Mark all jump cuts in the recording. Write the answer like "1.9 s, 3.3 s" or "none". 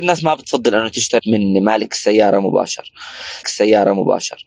1.2 s, 3.4 s